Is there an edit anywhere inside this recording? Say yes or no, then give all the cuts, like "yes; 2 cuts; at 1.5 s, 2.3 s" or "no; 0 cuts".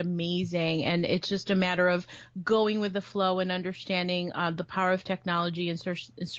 no; 0 cuts